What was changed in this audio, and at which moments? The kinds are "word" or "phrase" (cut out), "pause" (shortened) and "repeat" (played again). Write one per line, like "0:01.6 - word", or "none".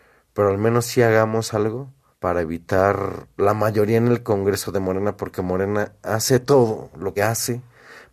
0:02.1 - pause
0:07.2 - word